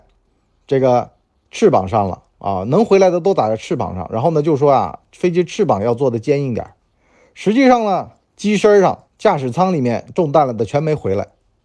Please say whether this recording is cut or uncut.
cut